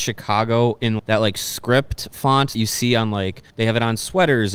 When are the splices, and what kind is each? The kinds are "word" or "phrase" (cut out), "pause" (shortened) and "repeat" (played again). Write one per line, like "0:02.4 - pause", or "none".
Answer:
0:01.0 - word
0:02.5 - word
0:03.5 - pause

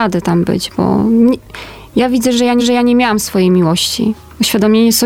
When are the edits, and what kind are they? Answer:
0:02.6 - repeat

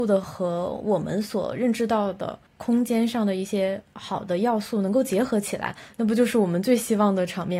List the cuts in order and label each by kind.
0:02.5 - pause

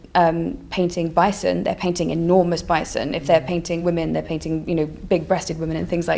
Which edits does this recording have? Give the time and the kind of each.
none

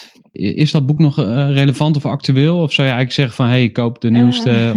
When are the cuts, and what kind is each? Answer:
none

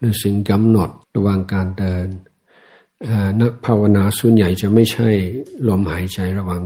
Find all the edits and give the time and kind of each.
0:01.0 - pause

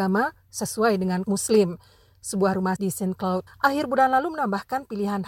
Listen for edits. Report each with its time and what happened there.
0:01.2 - word
0:02.8 - word
0:03.5 - word

